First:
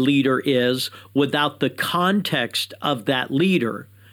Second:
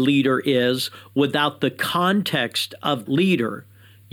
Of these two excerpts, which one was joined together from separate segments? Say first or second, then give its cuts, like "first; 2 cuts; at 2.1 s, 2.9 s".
second; 1 cut; at 3.1 s